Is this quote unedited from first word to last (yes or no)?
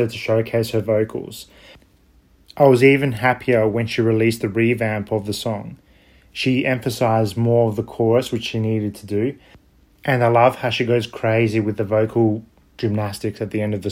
yes